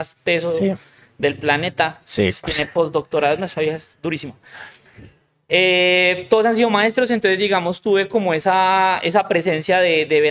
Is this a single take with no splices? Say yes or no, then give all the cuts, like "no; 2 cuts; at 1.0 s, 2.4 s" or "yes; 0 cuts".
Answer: yes; 0 cuts